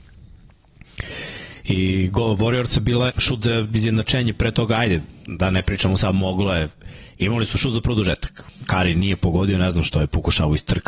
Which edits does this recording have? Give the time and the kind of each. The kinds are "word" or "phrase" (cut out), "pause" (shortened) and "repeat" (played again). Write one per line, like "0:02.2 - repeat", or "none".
0:03.1 - phrase